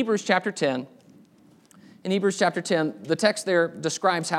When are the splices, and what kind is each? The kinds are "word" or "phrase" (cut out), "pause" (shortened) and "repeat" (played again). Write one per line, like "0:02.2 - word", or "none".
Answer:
none